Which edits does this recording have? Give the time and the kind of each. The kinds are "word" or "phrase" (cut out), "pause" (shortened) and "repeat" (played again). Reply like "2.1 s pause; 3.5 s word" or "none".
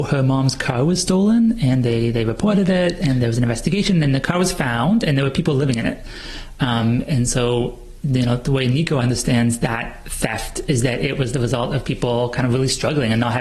none